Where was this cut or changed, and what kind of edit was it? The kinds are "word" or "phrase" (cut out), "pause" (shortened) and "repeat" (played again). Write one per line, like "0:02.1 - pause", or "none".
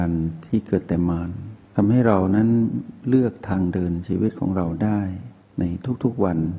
0:01.6 - pause